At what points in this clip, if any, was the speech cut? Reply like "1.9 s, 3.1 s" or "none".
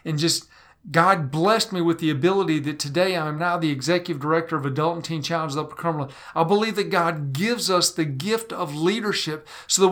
none